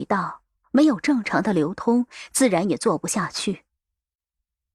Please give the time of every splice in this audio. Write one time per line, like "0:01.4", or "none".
none